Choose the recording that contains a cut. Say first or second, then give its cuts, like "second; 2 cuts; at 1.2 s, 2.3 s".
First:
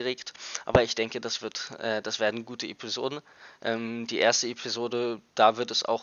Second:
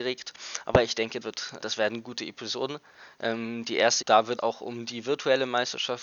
second; 4 cuts; at 1.2 s, 1.6 s, 4.0 s, 4.4 s